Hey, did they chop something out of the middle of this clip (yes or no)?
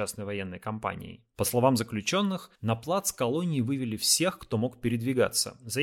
yes